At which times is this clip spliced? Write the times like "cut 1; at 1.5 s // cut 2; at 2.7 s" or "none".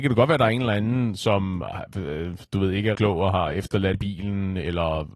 cut 1; at 2.9 s // cut 2; at 3.9 s